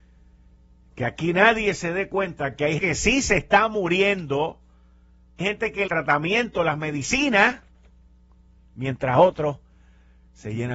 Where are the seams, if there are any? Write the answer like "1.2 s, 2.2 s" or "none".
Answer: 2.8 s, 5.4 s, 5.9 s